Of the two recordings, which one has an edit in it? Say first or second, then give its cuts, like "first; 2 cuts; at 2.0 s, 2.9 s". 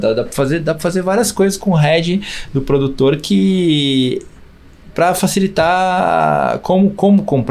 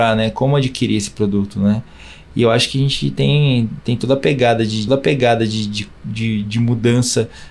second; 1 cut; at 4.9 s